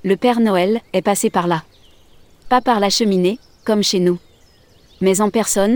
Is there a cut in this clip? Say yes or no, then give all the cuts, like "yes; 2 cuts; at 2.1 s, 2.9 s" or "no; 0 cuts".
no; 0 cuts